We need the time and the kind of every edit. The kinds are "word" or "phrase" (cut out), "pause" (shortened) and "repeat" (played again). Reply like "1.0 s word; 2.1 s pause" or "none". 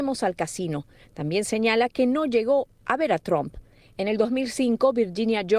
none